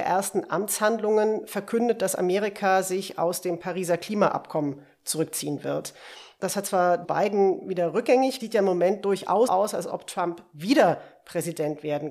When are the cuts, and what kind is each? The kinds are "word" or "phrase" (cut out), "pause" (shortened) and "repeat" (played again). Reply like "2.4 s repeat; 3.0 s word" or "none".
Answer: 7.0 s word; 8.4 s phrase; 9.5 s word